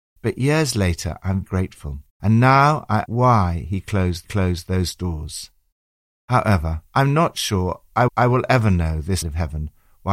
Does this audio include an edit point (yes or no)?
yes